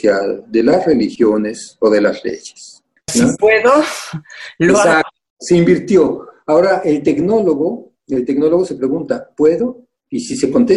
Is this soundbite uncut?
no; 1 cut; at 3.1 s

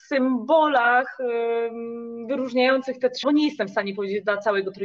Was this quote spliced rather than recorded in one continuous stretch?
yes; 1 cut; at 3.2 s

